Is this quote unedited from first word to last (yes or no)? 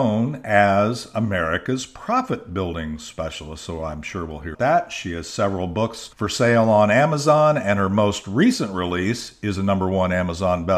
no